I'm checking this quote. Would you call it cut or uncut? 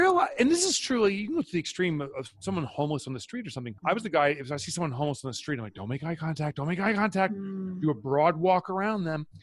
cut